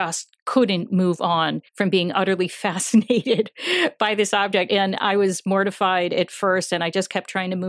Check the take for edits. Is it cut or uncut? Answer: cut